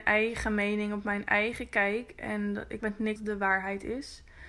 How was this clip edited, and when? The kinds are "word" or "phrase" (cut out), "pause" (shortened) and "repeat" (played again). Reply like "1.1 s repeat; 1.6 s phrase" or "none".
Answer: 2.8 s word; 3.2 s word